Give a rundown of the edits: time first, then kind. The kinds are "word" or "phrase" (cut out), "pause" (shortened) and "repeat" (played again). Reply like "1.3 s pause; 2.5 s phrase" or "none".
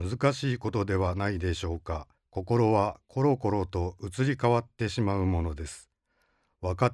2.2 s pause